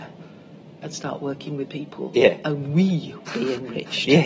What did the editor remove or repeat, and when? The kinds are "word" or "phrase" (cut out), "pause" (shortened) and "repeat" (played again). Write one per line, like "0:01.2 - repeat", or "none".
0:01.7 - word
0:03.3 - word